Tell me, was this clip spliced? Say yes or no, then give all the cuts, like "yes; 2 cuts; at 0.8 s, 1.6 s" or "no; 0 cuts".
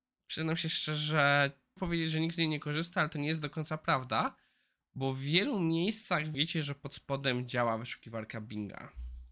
yes; 2 cuts; at 1.8 s, 6.3 s